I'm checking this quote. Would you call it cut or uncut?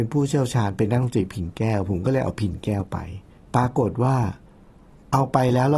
cut